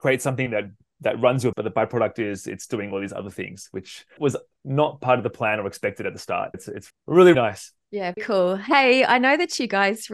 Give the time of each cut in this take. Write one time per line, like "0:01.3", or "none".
0:01.5
0:04.2
0:06.5
0:06.9
0:07.3
0:08.2